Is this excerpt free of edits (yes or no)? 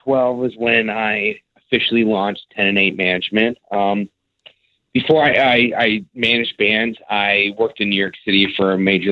yes